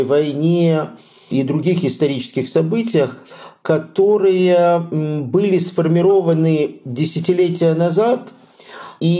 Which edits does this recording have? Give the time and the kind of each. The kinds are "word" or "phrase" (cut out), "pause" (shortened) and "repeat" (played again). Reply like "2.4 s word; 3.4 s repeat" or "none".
none

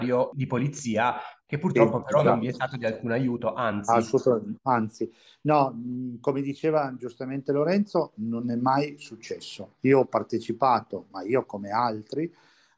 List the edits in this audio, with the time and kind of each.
none

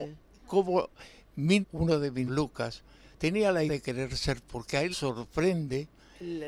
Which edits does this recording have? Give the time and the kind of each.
1.6 s word; 2.3 s word; 3.7 s word; 4.4 s word; 4.9 s word

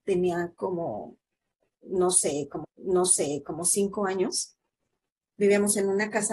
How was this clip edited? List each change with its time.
2.6 s repeat

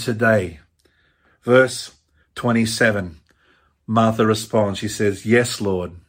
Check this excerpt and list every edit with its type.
none

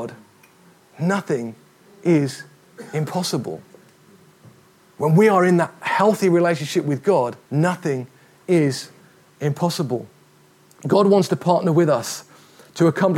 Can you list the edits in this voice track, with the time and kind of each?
7.4 s pause

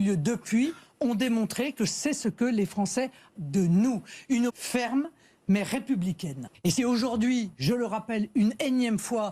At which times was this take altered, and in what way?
3.3 s word; 4.5 s word; 6.8 s word

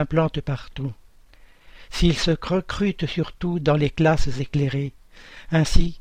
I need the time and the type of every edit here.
none

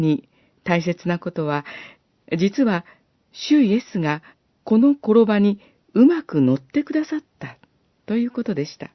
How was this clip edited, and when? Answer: 3.0 s pause; 4.3 s pause

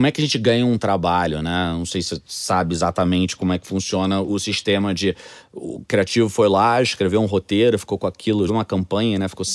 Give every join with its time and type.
4.3 s word; 8.5 s word

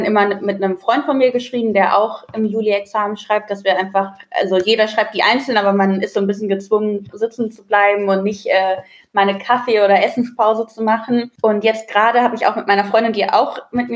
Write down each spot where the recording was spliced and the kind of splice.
none

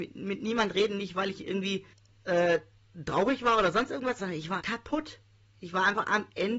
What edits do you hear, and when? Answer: 1.9 s pause; 4.2 s word; 4.6 s word

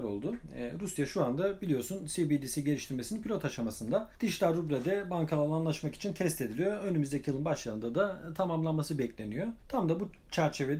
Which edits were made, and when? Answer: 4.1 s pause; 9.6 s pause

